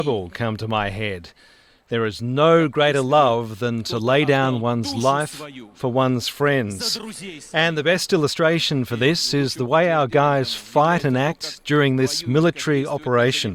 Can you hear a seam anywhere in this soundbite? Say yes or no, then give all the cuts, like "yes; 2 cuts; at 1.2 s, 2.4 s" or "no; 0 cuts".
no; 0 cuts